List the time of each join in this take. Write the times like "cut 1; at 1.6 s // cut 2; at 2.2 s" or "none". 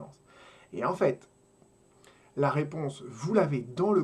none